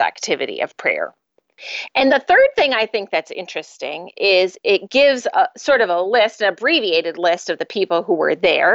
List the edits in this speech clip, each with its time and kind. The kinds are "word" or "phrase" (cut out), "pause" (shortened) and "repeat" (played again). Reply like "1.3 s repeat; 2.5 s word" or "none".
2.1 s word

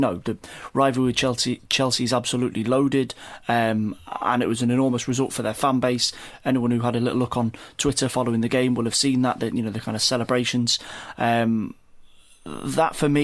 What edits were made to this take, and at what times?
none

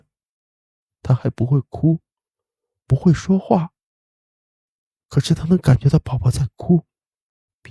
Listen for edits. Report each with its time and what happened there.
none

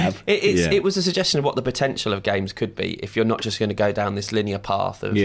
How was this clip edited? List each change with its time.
none

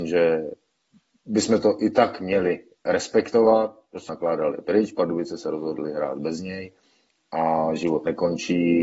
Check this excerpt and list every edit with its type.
4.1 s word

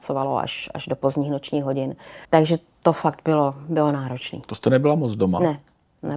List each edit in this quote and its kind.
2.2 s pause

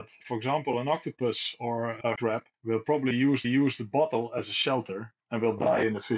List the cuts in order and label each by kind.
2.2 s word; 2.5 s pause; 3.4 s repeat; 5.2 s pause

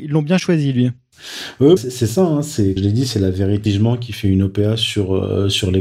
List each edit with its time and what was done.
1.8 s word; 2.8 s word; 3.7 s word

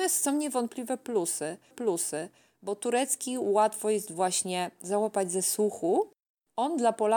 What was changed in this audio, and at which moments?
1.7 s repeat

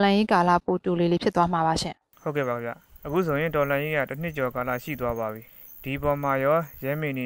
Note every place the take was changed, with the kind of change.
5.5 s pause

